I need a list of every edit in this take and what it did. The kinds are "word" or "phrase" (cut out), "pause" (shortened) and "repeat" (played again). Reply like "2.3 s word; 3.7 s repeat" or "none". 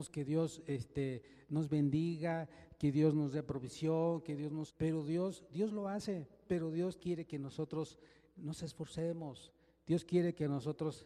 4.7 s word; 7.0 s word